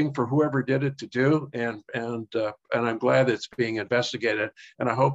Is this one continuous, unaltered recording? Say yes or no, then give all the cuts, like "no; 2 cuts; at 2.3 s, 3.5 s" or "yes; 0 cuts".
yes; 0 cuts